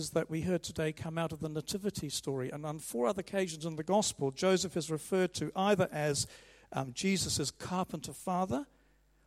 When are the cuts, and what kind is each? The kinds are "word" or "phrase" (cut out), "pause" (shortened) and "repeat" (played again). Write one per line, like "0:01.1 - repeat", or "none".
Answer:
none